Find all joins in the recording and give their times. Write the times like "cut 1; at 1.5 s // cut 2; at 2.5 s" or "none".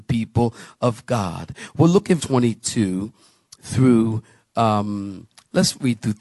cut 1; at 2.2 s